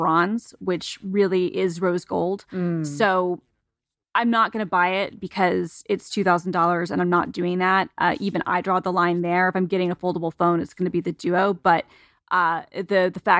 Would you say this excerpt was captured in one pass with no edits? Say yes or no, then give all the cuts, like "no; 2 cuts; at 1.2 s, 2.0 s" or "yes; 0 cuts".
yes; 0 cuts